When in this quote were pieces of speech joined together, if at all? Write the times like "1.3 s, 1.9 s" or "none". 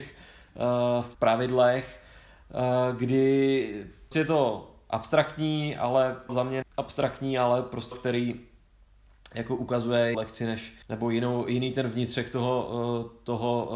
1.1 s, 4.1 s, 6.3 s, 6.6 s, 7.9 s, 10.1 s, 10.8 s